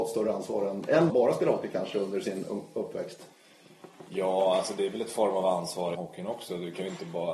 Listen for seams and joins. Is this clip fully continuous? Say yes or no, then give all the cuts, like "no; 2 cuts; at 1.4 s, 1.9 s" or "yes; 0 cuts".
no; 2 cuts; at 1.1 s, 5.9 s